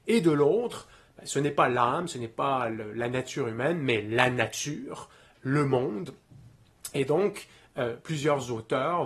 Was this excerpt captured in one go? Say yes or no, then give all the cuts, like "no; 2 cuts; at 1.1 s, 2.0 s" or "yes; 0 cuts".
yes; 0 cuts